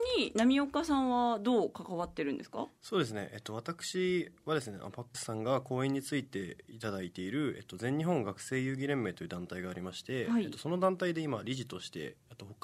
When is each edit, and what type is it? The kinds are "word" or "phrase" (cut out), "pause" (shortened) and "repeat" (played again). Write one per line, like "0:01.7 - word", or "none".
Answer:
0:05.1 - word